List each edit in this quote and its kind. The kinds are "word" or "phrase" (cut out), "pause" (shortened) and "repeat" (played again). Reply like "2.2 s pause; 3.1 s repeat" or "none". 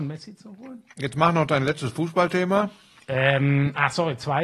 none